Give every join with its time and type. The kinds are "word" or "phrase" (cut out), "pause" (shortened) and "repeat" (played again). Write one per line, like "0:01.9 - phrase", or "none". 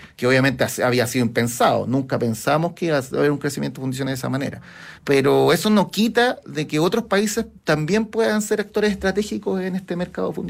0:05.0 - pause
0:07.6 - pause